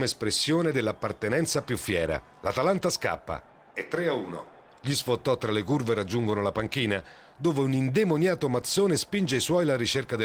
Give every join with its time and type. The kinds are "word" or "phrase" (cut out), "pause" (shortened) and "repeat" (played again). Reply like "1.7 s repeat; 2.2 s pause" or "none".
none

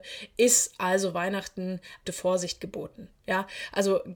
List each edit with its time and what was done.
2.0 s word

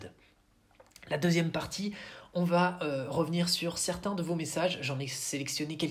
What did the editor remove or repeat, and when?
none

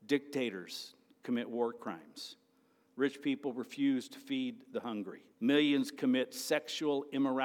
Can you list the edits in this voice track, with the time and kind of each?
5.3 s pause

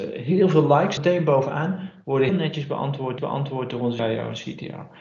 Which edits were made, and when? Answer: 1.0 s word; 2.3 s word; 3.2 s repeat; 4.0 s word

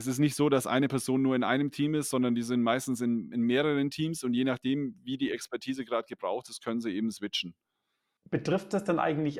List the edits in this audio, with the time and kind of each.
none

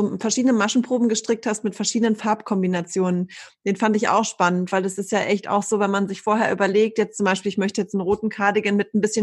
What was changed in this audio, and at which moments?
none

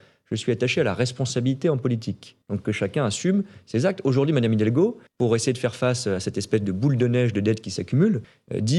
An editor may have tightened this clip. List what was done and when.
2.4 s pause; 5.1 s pause

